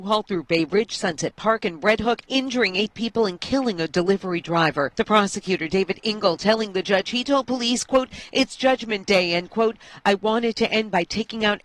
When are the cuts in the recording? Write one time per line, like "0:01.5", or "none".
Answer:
none

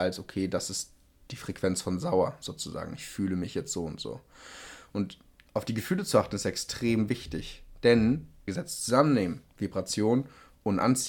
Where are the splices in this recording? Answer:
0:08.5

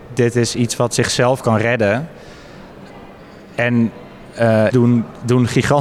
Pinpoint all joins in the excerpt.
0:04.7

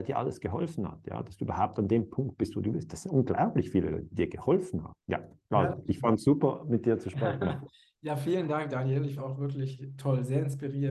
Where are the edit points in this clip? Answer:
0:05.0
0:09.2
0:10.0

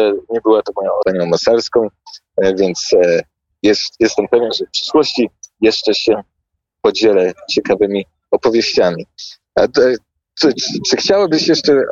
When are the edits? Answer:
0:01.0

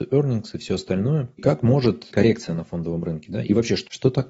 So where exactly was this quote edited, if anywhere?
0:01.4
0:02.1

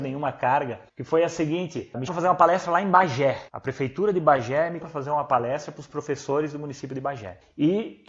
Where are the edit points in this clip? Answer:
0:02.1
0:04.8

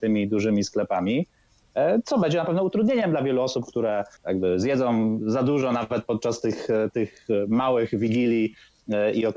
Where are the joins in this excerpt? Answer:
0:04.2

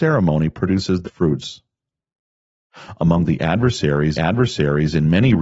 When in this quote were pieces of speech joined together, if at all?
0:01.0
0:04.1

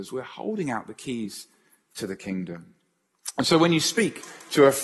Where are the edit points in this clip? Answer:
none

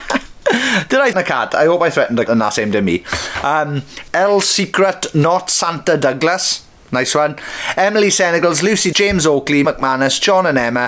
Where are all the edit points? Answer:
0:01.1
0:02.3
0:08.9
0:09.6

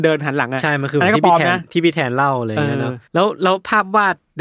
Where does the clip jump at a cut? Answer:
0:03.1

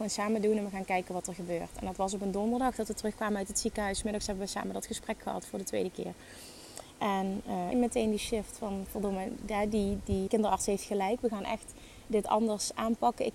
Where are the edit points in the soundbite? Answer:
0:07.7
0:10.3

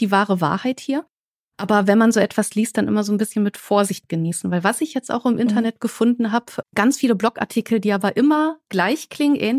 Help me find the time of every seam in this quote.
0:06.6

